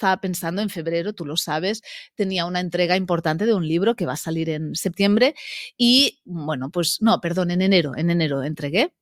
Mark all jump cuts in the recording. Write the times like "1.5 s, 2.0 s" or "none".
none